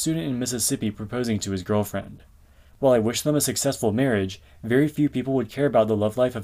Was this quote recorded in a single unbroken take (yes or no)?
yes